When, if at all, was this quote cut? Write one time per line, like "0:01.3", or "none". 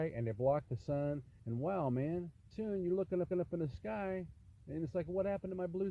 0:01.4
0:02.5
0:03.3